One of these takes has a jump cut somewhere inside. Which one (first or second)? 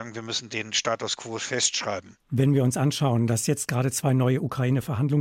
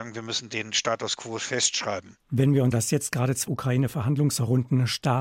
second